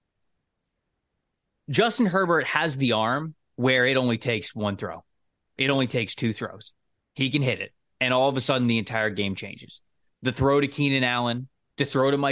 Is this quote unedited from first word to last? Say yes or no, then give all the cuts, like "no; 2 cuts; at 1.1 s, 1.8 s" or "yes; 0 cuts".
yes; 0 cuts